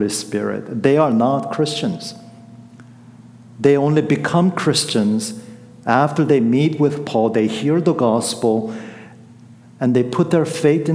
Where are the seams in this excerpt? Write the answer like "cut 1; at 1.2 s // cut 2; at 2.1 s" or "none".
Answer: none